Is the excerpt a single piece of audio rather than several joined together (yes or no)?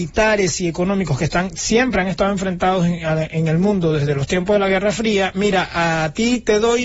yes